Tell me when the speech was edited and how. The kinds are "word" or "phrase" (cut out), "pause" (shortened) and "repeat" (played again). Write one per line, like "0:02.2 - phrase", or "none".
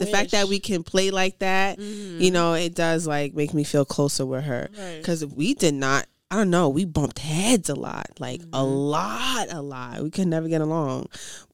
none